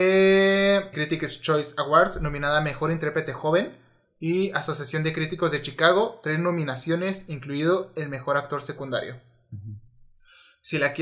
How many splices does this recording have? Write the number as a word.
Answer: one